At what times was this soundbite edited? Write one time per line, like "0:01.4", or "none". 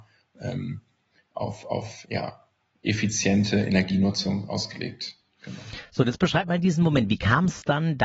0:02.0